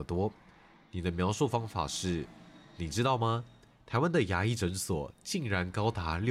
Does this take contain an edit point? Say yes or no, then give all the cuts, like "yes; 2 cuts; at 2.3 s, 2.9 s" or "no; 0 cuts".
no; 0 cuts